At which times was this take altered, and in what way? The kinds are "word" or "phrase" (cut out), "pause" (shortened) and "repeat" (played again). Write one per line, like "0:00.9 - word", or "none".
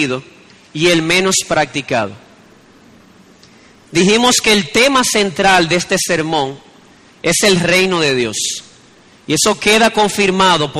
none